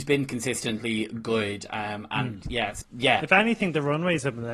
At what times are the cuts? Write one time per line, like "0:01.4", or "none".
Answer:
0:02.8